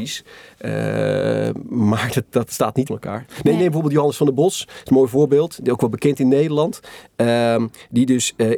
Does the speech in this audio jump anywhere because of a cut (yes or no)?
yes